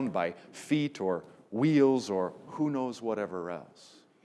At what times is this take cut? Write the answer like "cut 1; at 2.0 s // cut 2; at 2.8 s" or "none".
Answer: none